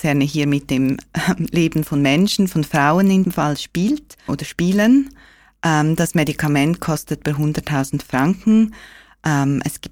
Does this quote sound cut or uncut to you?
cut